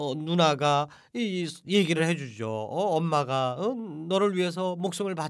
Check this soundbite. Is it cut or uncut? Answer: uncut